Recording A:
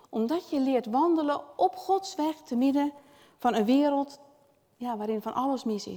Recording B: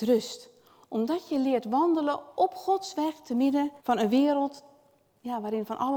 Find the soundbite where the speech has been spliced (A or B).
B